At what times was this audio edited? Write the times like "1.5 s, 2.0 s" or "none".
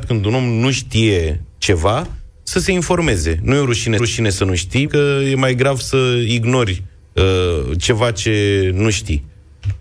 4.0 s, 4.9 s, 7.0 s